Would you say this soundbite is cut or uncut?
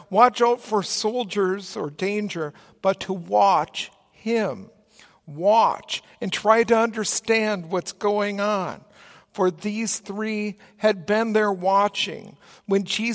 uncut